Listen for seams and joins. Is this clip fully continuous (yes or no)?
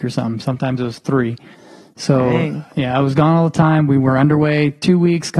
yes